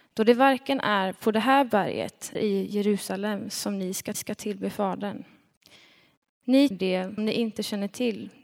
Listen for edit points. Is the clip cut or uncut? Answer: cut